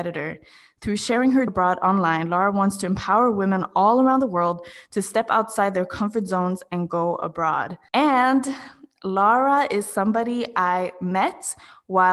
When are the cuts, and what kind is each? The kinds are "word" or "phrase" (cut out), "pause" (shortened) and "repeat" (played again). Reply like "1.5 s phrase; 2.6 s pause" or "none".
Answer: 1.5 s word